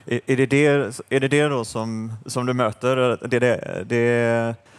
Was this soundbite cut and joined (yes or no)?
no